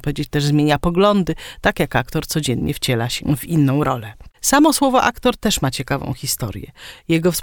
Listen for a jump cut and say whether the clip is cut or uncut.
uncut